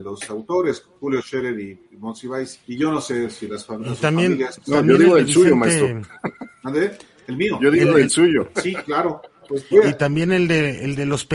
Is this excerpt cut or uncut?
cut